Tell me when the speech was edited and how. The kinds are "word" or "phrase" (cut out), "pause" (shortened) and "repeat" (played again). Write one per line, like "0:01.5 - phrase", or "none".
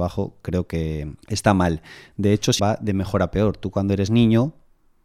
0:01.2 - pause
0:02.6 - phrase